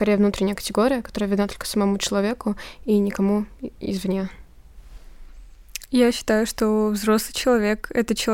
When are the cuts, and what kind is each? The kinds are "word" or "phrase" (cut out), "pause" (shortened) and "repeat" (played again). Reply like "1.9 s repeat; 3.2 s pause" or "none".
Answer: none